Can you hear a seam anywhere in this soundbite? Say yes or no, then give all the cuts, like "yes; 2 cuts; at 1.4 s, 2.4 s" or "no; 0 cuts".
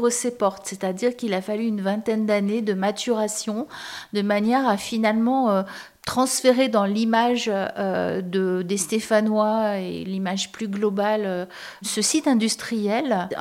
no; 0 cuts